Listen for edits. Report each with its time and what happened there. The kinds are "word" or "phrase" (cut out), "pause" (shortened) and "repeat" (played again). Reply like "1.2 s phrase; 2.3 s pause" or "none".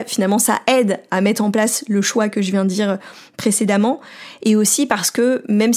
none